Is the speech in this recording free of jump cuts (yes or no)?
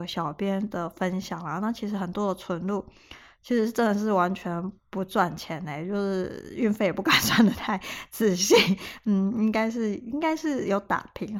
yes